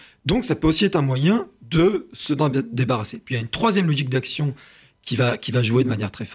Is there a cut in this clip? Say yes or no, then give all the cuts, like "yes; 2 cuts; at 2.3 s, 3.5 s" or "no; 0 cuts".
no; 0 cuts